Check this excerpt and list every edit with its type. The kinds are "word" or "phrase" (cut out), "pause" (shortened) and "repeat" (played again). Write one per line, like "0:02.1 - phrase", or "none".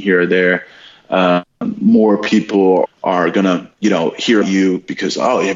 0:02.9 - word
0:03.7 - pause
0:04.4 - word